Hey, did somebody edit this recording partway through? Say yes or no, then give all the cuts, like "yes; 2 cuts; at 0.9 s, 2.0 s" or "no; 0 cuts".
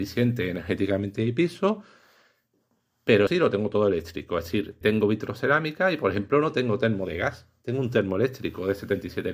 yes; 2 cuts; at 3.3 s, 4.8 s